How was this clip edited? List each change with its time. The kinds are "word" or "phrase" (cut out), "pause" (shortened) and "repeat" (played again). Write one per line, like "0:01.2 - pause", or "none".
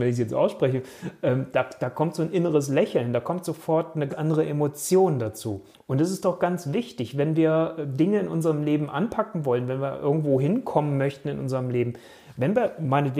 0:04.1 - word
0:05.7 - pause